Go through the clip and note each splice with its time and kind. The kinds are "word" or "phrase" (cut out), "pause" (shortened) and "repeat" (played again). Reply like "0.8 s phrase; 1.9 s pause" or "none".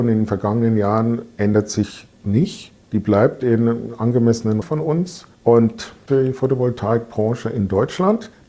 4.6 s word; 6.1 s phrase